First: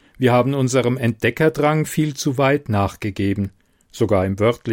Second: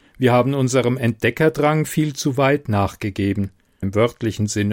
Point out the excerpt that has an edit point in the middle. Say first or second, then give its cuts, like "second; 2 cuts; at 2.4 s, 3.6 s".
second; 1 cut; at 3.8 s